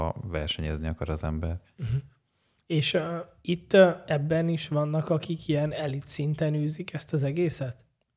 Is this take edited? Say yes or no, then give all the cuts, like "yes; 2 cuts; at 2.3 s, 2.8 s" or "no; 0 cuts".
no; 0 cuts